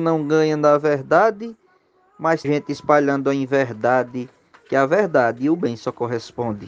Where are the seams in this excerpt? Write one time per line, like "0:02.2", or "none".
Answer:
0:02.4